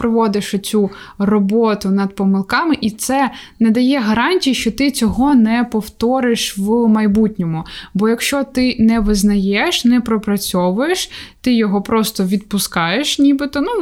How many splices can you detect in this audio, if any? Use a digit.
0